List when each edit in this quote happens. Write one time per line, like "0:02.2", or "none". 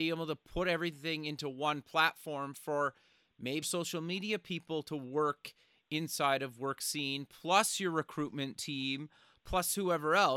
0:03.6